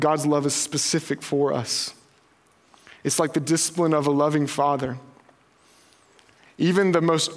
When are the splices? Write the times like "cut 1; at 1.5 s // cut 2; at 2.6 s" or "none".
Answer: none

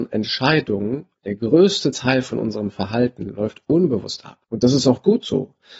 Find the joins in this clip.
cut 1; at 1.2 s // cut 2; at 4.4 s

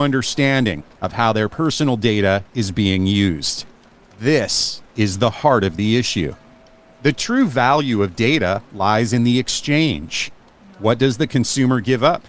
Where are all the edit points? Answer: none

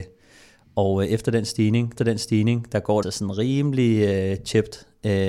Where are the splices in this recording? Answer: cut 1; at 2.0 s // cut 2; at 3.0 s

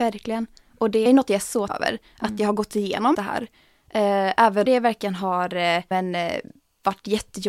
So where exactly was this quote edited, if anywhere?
cut 1; at 1.1 s // cut 2; at 1.7 s // cut 3; at 3.1 s // cut 4; at 4.7 s // cut 5; at 5.9 s

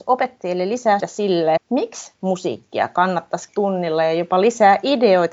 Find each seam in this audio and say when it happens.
cut 1; at 1.0 s // cut 2; at 1.6 s // cut 3; at 3.5 s

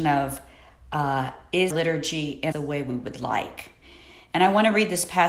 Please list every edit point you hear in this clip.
cut 1; at 1.7 s // cut 2; at 2.5 s

